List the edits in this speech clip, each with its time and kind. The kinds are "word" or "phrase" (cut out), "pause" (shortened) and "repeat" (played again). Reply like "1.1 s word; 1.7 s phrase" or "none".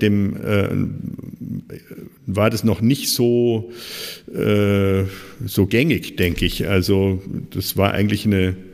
none